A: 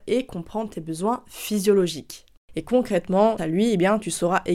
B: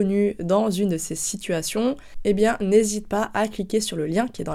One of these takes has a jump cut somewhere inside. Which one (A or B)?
A